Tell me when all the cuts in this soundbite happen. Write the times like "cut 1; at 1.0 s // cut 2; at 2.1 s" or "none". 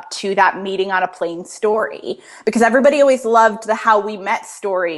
none